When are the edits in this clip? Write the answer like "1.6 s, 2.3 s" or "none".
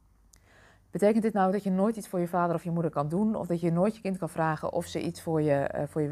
none

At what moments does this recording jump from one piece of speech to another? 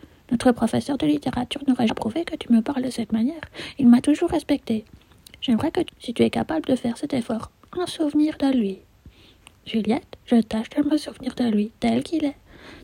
1.9 s, 5.9 s

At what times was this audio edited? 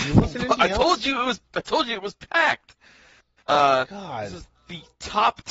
none

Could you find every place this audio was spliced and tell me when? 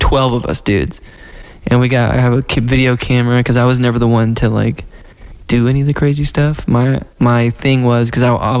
none

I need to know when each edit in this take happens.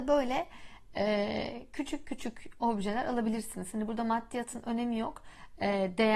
none

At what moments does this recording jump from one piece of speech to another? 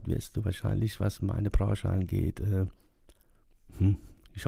none

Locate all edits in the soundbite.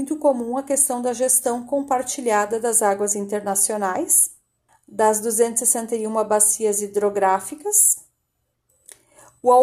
4.7 s, 8.7 s

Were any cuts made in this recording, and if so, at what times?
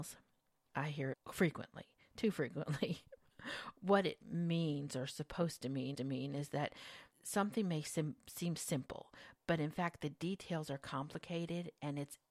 1.1 s, 4.2 s, 5.9 s, 7.1 s, 8.6 s, 9.4 s

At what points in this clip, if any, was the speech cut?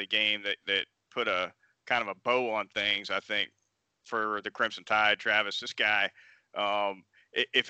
none

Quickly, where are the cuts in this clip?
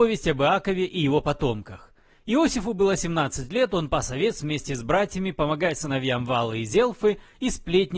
none

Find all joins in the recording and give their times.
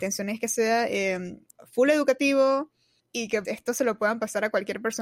1.5 s, 3.0 s, 3.4 s

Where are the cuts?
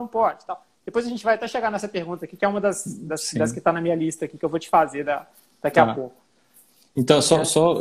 none

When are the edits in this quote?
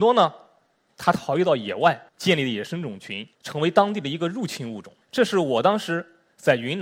2.1 s, 3.3 s, 5.0 s

